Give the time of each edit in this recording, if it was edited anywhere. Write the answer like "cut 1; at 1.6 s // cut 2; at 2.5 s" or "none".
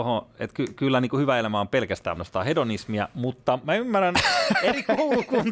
cut 1; at 2.2 s